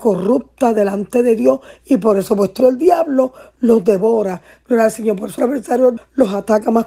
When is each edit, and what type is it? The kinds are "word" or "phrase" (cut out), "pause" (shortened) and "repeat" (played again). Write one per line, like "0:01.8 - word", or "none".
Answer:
0:02.6 - word
0:05.4 - word
0:06.0 - word

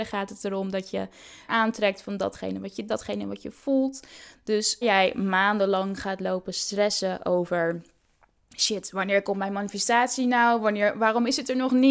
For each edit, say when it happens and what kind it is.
0:01.5 - word
0:02.9 - word
0:04.8 - word

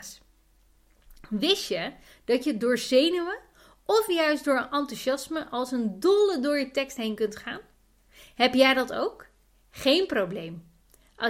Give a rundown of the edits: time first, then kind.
none

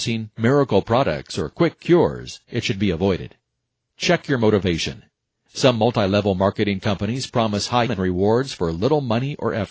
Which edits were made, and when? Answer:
0:07.9 - word

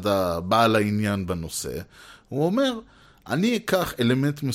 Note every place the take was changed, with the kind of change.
none

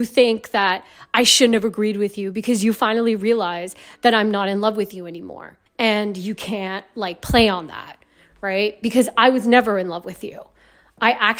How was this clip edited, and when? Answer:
0:05.7 - pause

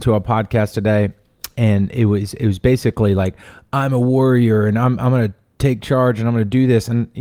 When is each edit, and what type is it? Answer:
none

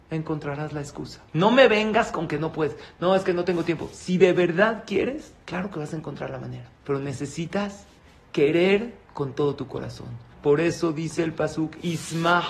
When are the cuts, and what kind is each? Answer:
0:01.3 - pause
0:05.4 - pause
0:06.8 - pause
0:09.0 - pause
0:10.3 - pause

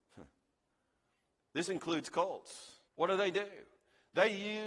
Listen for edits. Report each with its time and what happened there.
0:02.9 - pause

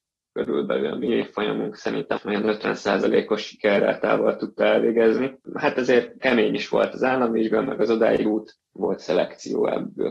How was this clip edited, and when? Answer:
0:02.2 - word
0:06.2 - word
0:08.2 - word

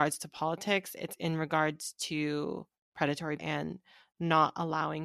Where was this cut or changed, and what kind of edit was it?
0:03.4 - word

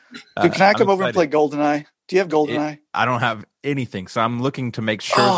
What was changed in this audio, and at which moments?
0:03.5 - pause

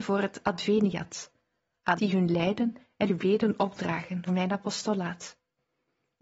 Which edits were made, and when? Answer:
0:02.0 - word
0:03.1 - word
0:04.3 - word

